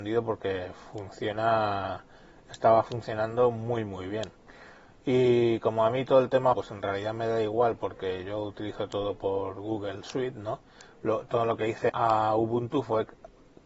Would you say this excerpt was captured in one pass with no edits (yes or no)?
no